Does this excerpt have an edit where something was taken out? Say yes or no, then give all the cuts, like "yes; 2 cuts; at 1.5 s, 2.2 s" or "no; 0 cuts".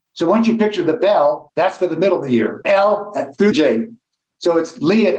yes; 1 cut; at 3.5 s